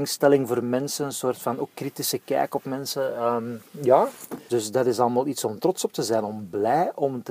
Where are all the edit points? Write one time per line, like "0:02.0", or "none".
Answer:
0:04.5